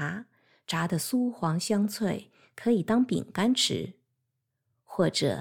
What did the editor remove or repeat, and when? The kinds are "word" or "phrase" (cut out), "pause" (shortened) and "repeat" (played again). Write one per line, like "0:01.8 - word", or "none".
none

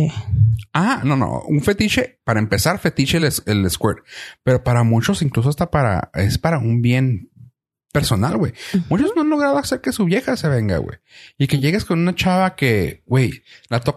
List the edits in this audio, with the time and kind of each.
none

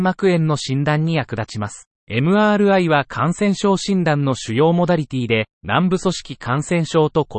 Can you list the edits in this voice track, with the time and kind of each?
0:02.0 - pause
0:05.5 - pause

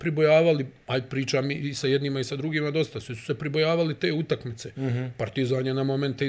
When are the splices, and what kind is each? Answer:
none

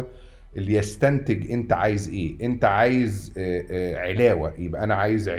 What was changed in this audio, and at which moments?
none

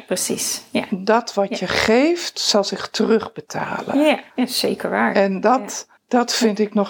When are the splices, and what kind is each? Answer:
0:04.3 - pause
0:06.0 - pause

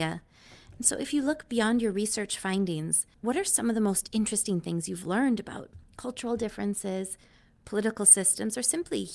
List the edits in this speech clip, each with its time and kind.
0:03.1 - pause

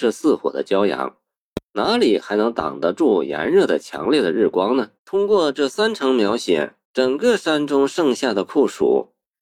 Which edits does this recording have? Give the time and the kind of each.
0:05.0 - pause
0:06.8 - pause

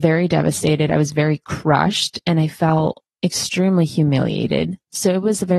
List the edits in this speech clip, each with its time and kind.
none

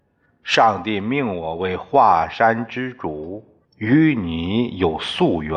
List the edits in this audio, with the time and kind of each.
0:03.6 - pause

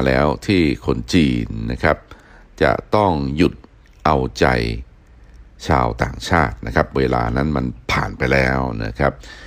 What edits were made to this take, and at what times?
none

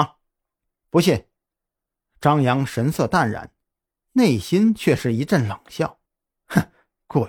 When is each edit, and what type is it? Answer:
0:06.1 - pause

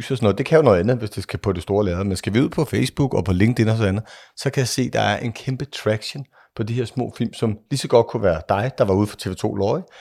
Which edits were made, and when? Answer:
none

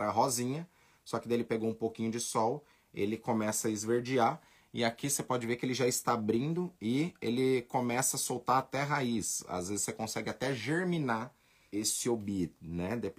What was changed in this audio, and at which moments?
0:11.7 - word

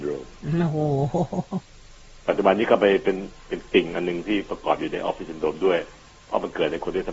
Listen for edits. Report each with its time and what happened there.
none

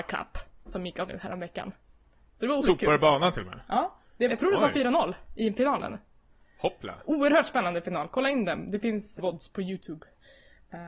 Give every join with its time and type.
0:01.1 - word
0:02.6 - word
0:04.3 - word
0:09.2 - word

